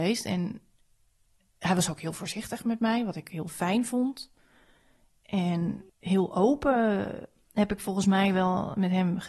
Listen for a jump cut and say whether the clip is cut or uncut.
uncut